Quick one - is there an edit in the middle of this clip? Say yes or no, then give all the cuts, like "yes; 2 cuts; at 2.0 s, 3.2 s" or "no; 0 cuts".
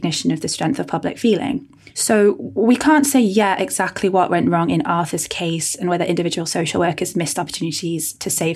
no; 0 cuts